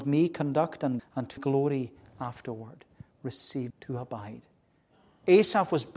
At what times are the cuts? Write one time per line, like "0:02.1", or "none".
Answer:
0:01.0
0:01.4
0:03.7